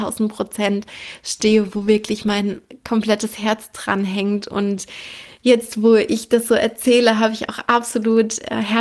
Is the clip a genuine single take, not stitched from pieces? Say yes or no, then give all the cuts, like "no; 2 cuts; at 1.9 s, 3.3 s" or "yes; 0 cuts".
yes; 0 cuts